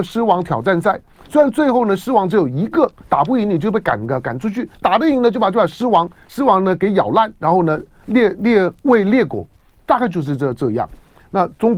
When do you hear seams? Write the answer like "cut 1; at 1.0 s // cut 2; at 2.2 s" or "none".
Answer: none